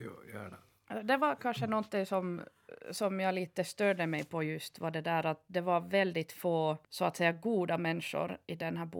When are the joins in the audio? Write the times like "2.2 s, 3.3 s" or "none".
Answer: 6.8 s